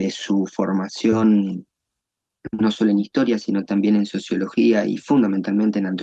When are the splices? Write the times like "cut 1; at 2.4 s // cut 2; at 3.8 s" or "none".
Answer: none